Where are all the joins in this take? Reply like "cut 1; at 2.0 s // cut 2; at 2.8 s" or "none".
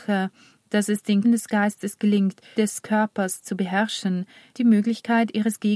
cut 1; at 1.2 s // cut 2; at 2.6 s // cut 3; at 4.5 s

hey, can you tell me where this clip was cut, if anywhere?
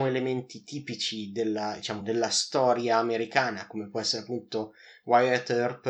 none

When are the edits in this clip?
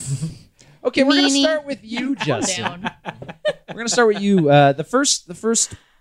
none

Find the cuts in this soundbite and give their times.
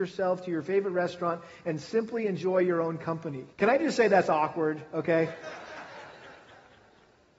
cut 1; at 3.5 s

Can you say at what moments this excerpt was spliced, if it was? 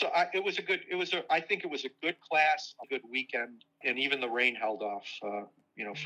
cut 1; at 2.8 s // cut 2; at 3.8 s

